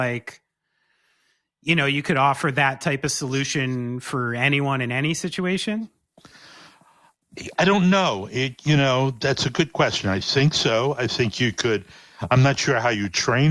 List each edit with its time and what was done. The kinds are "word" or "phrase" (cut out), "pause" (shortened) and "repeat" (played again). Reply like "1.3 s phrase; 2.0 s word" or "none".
7.6 s word